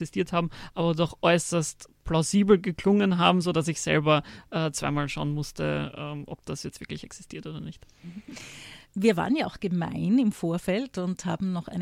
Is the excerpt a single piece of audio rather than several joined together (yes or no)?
yes